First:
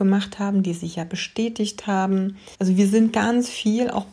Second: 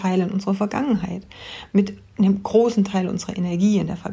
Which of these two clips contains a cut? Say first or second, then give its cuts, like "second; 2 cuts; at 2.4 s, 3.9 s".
first; 1 cut; at 2.5 s